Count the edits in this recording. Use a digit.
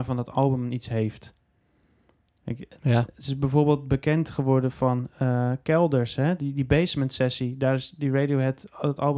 0